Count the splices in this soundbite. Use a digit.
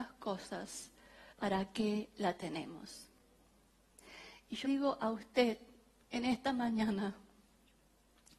2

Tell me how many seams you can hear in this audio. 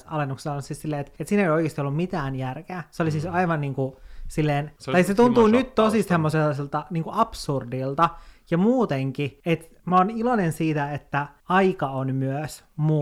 0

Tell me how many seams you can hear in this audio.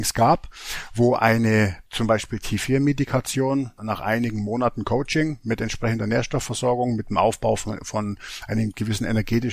2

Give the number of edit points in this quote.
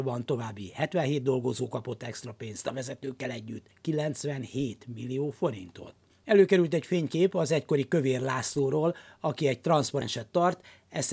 1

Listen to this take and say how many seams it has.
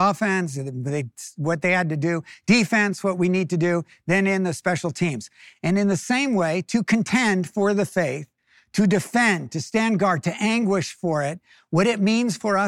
0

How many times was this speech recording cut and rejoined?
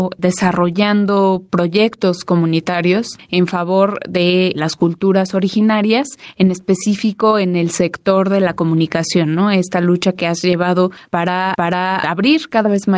1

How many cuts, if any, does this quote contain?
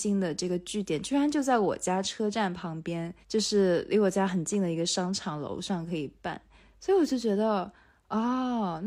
1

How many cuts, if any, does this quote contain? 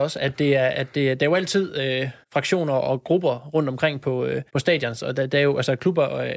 2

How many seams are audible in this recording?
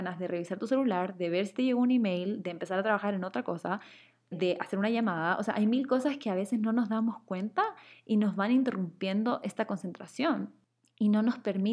1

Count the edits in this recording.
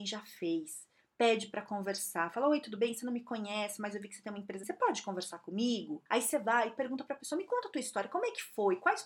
2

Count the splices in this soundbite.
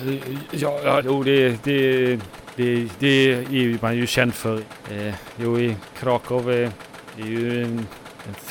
1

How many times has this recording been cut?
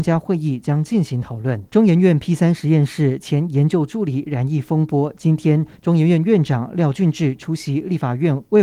1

